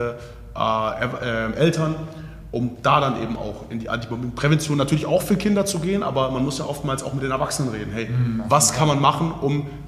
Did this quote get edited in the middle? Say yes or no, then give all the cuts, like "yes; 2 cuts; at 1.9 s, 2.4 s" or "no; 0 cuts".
no; 0 cuts